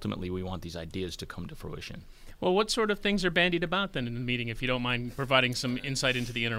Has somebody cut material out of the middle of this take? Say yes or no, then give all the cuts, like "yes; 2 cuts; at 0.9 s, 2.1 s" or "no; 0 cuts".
no; 0 cuts